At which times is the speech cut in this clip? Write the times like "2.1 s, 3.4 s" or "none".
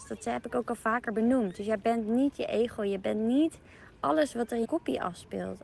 4.6 s